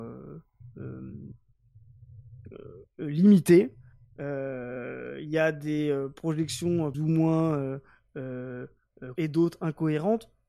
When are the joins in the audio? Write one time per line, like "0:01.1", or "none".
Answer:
0:06.9
0:09.1